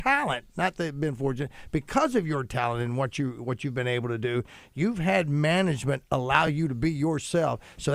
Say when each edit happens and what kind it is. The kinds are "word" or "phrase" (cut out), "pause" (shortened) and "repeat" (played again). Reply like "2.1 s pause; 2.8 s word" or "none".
none